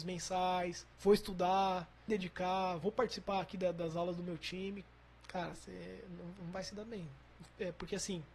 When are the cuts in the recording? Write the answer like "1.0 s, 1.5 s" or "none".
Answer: 0.9 s, 2.1 s